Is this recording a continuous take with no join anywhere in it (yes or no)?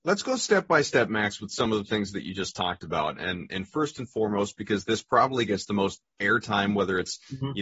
yes